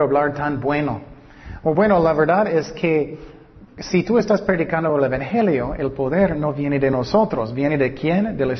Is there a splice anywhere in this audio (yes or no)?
no